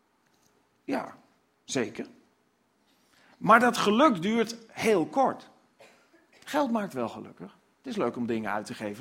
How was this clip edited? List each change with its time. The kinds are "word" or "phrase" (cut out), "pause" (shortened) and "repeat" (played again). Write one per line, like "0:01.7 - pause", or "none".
none